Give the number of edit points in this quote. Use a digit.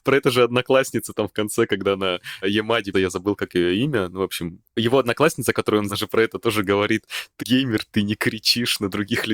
5